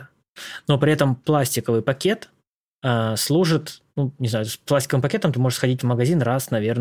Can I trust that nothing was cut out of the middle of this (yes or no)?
yes